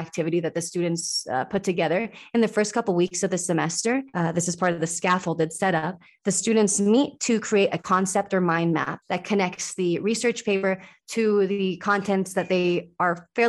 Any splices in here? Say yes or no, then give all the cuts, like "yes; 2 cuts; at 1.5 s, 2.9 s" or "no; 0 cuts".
yes; 1 cut; at 9.0 s